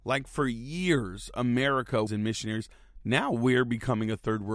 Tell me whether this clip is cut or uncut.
cut